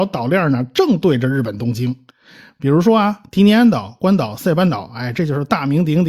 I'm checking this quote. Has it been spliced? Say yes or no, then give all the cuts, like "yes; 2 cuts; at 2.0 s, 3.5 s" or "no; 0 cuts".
no; 0 cuts